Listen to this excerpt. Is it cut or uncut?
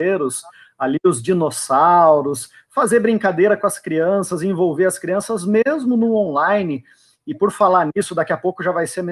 uncut